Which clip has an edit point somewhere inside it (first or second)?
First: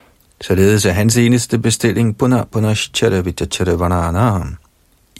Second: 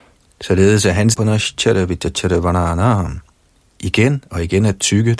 second